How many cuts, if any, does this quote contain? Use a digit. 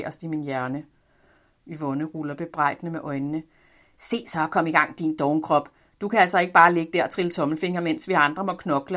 0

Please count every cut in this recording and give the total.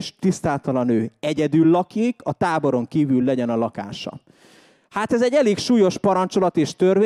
0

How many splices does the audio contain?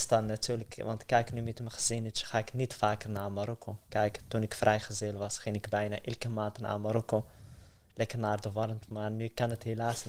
0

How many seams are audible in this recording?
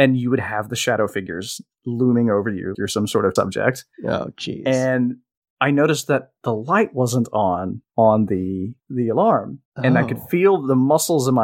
8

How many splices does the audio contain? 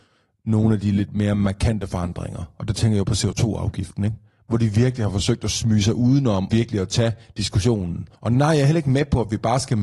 2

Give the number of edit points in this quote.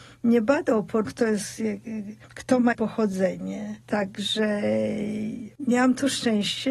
2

